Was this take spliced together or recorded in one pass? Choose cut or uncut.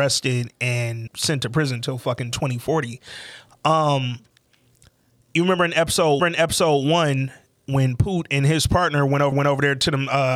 cut